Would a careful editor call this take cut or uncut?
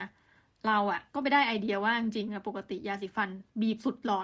cut